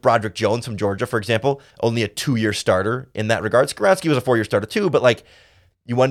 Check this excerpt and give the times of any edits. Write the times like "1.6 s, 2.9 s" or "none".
1.7 s